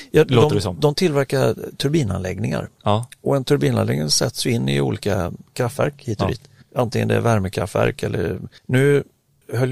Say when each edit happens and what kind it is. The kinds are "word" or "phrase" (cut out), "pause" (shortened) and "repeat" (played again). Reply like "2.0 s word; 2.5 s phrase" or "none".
6.6 s pause; 8.6 s pause